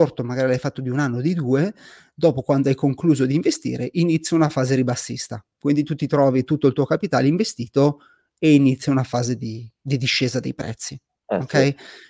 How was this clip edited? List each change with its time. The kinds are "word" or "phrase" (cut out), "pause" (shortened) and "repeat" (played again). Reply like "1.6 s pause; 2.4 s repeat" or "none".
none